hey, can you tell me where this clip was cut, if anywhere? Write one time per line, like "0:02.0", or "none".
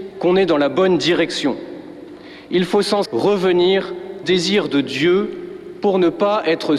0:03.1
0:04.2

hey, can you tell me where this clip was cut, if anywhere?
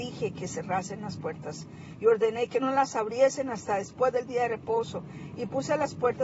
none

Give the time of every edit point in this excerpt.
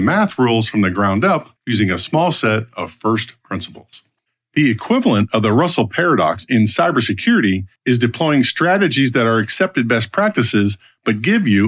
0:01.6
0:04.3
0:07.8

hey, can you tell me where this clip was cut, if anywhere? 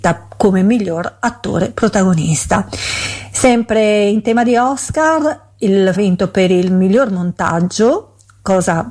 0:05.9

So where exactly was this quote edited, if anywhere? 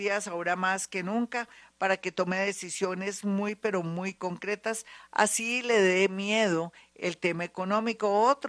none

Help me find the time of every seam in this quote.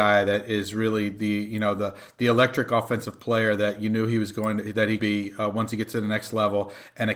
0:05.0

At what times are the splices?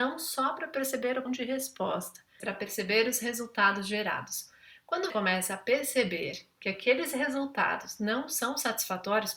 0:01.3
0:02.4
0:05.1

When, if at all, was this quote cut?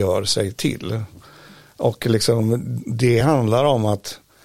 none

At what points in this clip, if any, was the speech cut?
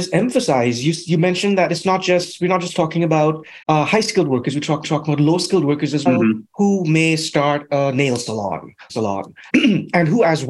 0:03.6
0:04.8
0:06.1
0:08.9
0:09.5

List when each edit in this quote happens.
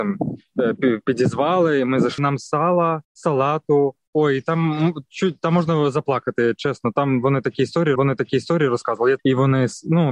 0:02.2
0:03.0
0:08.0
0:09.2

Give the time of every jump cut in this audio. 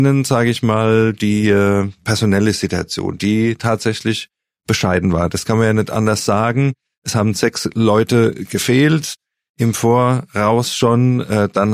none

